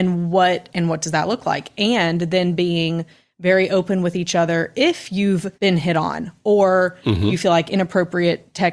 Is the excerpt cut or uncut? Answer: cut